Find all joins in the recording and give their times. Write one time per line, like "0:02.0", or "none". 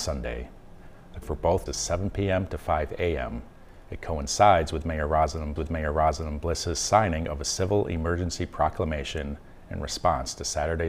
0:01.2
0:01.7
0:05.6

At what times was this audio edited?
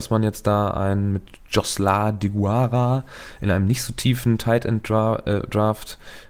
none

